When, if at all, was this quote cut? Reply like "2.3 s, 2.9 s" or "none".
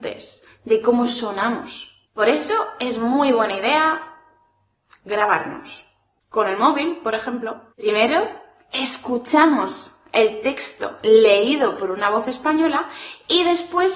none